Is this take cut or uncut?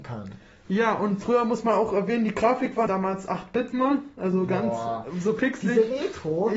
cut